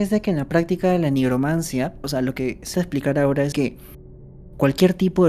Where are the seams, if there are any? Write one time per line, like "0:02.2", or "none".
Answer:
0:02.0
0:02.7
0:03.5